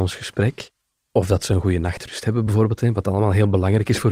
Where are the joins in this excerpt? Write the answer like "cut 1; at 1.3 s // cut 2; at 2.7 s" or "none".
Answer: none